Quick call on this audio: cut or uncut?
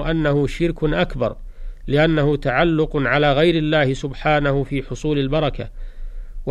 uncut